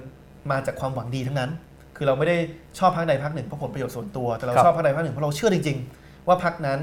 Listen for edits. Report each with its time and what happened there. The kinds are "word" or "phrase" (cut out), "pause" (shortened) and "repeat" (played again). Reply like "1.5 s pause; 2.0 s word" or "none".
none